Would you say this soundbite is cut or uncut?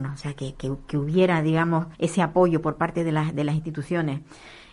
cut